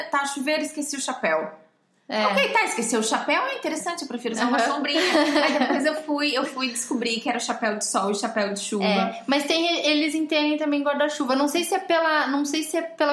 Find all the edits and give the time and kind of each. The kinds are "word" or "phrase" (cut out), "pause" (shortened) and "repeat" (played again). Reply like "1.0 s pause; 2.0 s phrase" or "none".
none